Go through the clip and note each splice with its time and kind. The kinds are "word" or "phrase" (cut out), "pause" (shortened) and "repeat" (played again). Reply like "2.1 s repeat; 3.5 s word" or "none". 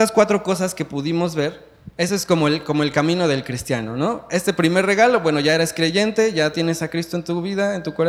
none